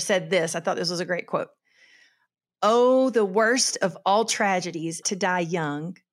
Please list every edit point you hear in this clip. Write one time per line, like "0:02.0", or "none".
0:05.0